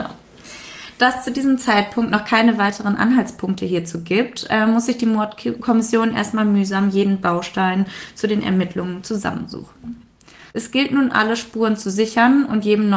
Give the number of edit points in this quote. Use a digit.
1